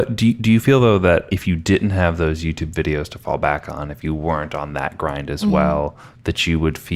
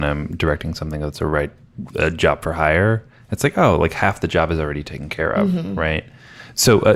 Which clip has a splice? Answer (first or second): second